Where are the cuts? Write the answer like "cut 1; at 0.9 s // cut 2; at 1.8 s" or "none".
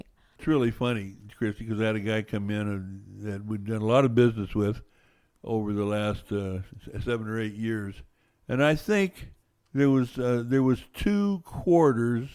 none